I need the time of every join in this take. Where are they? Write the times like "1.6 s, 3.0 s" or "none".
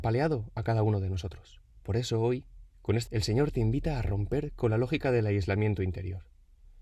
1.7 s, 3.1 s